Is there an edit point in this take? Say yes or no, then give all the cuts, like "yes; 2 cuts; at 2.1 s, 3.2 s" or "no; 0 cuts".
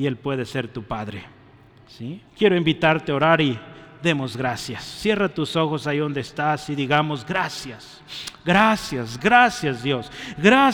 yes; 2 cuts; at 2.3 s, 9.2 s